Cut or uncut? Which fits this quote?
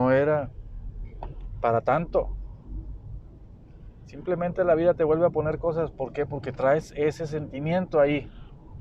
uncut